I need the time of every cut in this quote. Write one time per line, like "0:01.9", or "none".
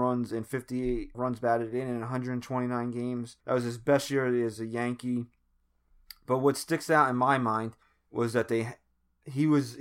0:01.1
0:03.4
0:07.8